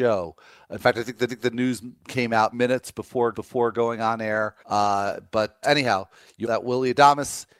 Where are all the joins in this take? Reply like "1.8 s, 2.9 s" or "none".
1.3 s, 2.5 s, 3.3 s, 4.6 s, 5.6 s, 6.4 s